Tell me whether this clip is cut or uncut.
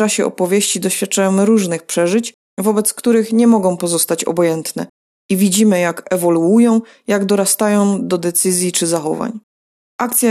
uncut